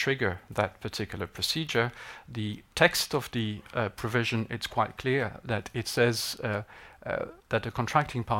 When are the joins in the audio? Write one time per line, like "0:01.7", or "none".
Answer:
none

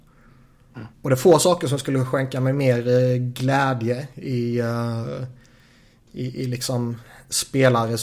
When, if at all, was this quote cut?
0:00.9

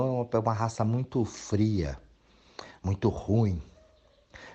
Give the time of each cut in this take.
none

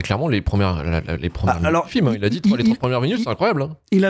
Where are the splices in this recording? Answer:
none

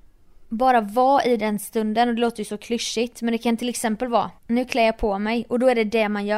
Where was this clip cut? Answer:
0:04.4

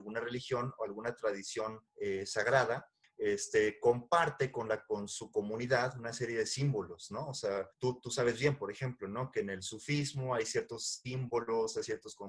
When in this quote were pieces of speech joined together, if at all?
0:01.9
0:03.0
0:07.7

